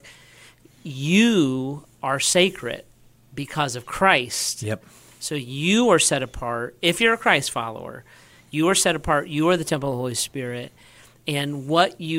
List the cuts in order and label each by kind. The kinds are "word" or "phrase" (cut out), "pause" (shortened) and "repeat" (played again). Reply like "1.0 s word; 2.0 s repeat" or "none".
none